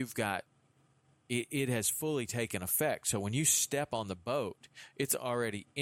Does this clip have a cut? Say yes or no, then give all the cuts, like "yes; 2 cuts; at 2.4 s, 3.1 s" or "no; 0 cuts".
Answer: no; 0 cuts